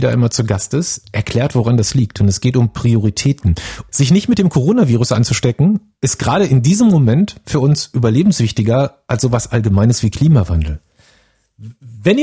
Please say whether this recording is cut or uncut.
uncut